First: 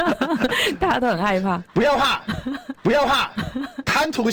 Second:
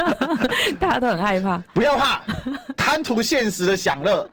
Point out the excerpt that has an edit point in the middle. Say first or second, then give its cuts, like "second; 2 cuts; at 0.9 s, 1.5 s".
first; 1 cut; at 2.7 s